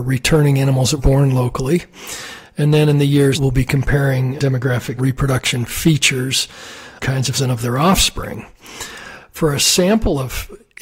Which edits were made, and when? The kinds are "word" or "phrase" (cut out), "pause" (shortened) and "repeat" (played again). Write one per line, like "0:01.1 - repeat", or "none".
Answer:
0:01.0 - word
0:03.3 - phrase
0:04.4 - word
0:05.0 - phrase
0:07.0 - phrase
0:07.3 - word